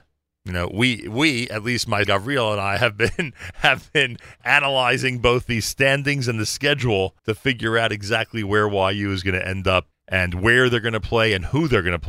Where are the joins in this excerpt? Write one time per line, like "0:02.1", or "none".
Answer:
0:02.0
0:07.2
0:09.9